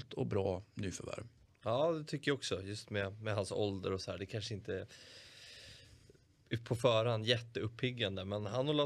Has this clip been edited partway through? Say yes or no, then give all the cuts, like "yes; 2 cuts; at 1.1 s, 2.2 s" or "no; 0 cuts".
no; 0 cuts